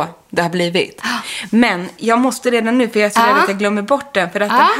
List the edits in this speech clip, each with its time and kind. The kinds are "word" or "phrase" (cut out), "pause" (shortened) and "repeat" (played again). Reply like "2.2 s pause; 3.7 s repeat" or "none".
none